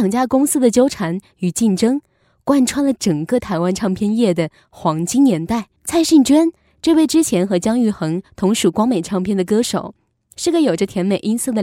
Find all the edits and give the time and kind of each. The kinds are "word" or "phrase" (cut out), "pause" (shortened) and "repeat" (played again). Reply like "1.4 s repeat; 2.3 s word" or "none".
5.8 s pause